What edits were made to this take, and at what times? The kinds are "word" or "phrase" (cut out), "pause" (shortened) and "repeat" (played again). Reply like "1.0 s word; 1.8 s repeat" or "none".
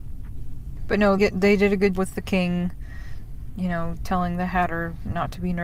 1.2 s word; 2.0 s word

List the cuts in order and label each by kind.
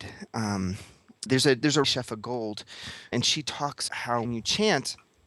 1.3 s word; 1.8 s word; 3.1 s word; 3.9 s word; 4.2 s word

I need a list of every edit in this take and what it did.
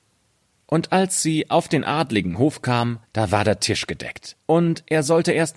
3.0 s pause; 4.4 s pause

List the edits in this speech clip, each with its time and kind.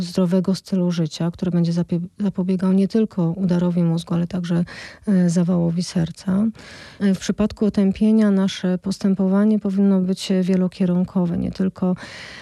none

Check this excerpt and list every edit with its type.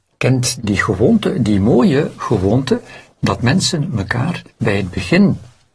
4.5 s pause

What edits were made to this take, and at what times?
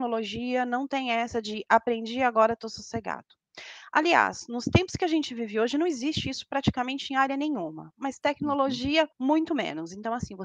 9.1 s pause

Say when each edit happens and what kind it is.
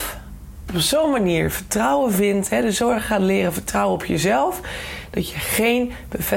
none

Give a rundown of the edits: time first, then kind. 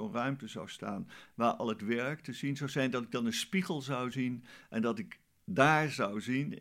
none

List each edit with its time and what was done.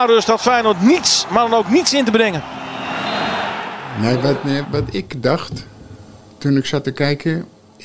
4.6 s word

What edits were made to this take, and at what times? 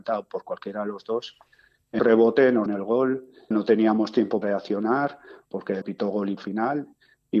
2.0 s word; 2.7 s word; 3.5 s word; 4.4 s word; 5.8 s word; 6.4 s word

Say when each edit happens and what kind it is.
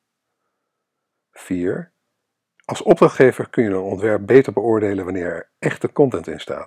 none

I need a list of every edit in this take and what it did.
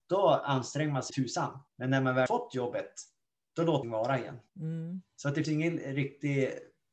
1.1 s word; 1.7 s pause; 2.3 s word; 3.8 s phrase; 4.5 s pause; 5.4 s word

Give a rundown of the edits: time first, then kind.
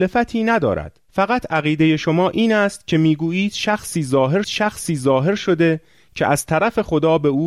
1.0 s pause; 4.4 s repeat

